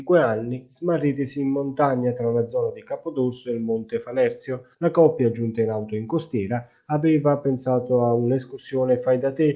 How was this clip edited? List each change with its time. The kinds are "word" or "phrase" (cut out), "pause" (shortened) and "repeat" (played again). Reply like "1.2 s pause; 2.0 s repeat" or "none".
4.7 s pause